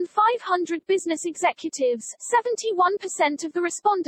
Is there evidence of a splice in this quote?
yes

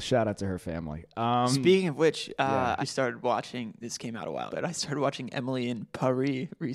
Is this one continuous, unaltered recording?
no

